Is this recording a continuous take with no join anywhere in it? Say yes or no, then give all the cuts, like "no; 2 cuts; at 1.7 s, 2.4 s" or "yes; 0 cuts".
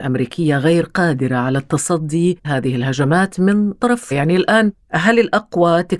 no; 2 cuts; at 2.4 s, 4.1 s